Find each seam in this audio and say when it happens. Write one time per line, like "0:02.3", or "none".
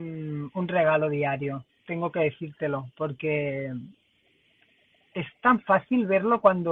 0:01.7